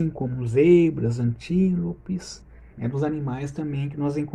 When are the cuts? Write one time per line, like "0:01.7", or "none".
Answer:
0:02.7